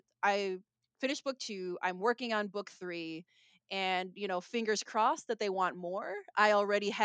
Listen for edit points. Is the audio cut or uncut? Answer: uncut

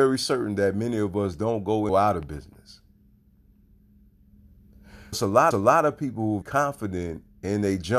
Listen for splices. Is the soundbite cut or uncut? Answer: cut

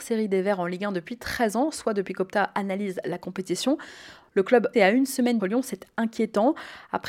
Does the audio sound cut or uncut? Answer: cut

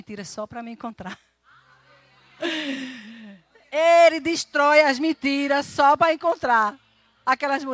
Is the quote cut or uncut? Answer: uncut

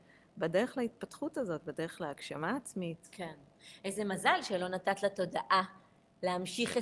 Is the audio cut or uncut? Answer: uncut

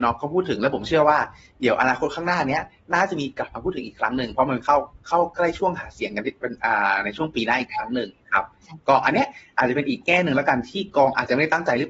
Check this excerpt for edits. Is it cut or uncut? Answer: uncut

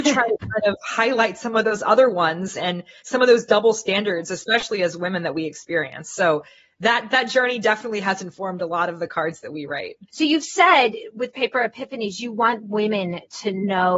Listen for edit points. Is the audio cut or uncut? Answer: cut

